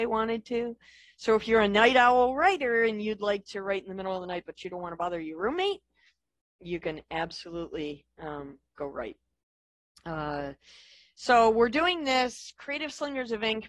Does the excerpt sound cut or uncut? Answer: uncut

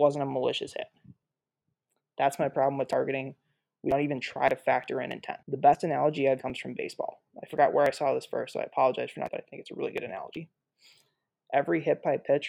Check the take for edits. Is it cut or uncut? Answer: cut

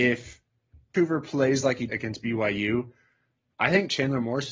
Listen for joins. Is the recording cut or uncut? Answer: cut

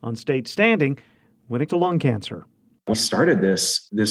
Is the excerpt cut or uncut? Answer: cut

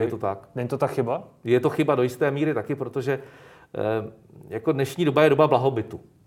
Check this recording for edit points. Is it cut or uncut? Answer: uncut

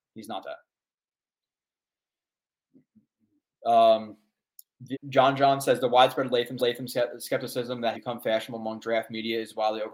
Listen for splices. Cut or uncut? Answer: cut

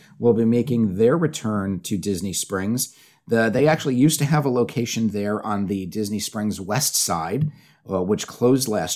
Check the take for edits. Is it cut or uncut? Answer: uncut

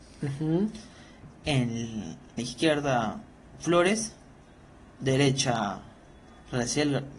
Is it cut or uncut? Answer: cut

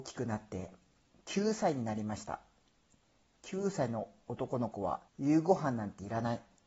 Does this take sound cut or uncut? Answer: cut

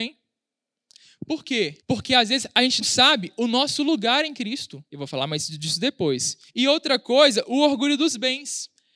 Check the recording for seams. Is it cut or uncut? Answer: cut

